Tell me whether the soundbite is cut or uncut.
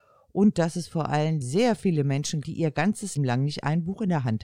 cut